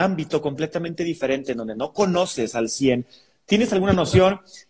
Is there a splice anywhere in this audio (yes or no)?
no